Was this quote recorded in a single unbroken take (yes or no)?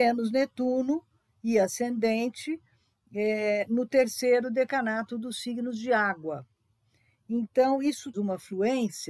no